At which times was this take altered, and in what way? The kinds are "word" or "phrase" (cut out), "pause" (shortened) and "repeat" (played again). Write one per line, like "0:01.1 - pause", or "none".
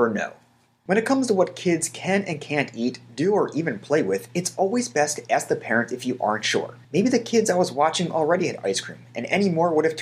0:06.8 - pause